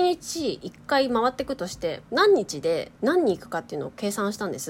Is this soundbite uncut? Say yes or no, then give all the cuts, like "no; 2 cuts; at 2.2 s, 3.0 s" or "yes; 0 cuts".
no; 2 cuts; at 2.1 s, 3.0 s